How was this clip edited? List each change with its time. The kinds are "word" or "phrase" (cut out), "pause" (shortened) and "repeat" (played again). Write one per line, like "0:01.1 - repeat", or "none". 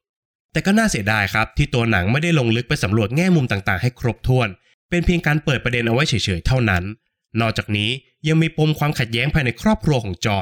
none